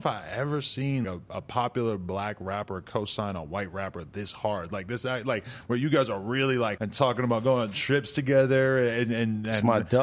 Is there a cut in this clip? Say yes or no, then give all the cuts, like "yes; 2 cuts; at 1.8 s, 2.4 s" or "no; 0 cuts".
yes; 2 cuts; at 1.0 s, 6.8 s